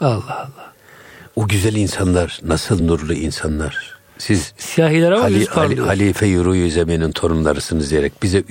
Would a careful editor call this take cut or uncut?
uncut